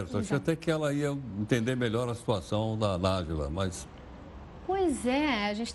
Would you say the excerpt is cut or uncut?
uncut